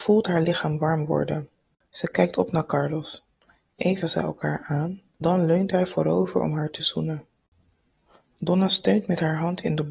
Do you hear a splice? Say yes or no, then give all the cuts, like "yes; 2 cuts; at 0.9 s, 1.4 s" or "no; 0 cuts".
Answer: yes; 2 cuts; at 4.0 s, 5.2 s